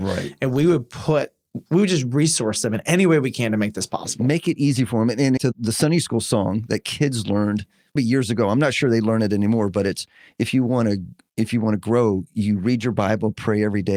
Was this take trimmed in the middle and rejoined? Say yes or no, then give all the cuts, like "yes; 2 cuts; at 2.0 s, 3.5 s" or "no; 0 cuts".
yes; 2 cuts; at 5.4 s, 8.0 s